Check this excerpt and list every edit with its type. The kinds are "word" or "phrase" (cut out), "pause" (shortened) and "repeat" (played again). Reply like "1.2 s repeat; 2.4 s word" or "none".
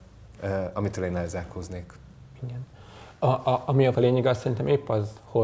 3.9 s word